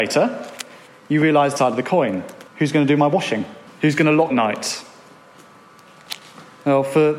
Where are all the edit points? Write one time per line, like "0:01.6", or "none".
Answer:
0:01.6
0:02.5
0:03.7
0:04.3